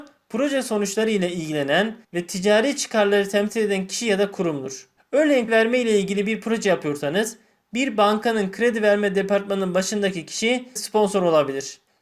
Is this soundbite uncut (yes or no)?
no